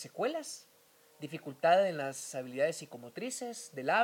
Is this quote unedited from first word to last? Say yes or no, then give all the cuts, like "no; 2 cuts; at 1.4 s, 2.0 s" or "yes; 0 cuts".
yes; 0 cuts